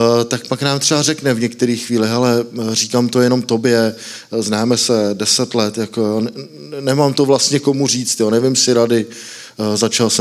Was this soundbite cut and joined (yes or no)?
no